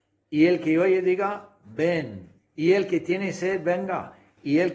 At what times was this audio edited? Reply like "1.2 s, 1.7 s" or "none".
2.4 s